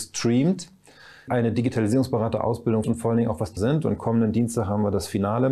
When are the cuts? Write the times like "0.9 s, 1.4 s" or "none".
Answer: 1.3 s, 2.8 s, 3.6 s